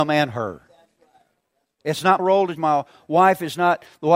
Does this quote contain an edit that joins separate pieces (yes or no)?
yes